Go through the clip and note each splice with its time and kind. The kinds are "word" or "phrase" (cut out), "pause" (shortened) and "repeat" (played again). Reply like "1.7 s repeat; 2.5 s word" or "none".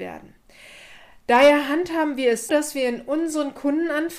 2.5 s word